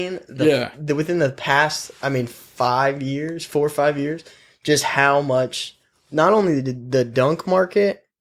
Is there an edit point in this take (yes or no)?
no